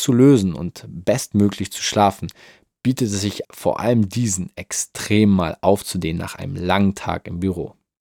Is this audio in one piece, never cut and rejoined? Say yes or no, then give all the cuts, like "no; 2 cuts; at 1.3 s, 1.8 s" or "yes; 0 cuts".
no; 1 cut; at 3.4 s